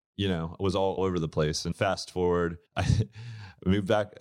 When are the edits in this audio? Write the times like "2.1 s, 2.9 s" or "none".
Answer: 1.0 s, 1.7 s, 2.7 s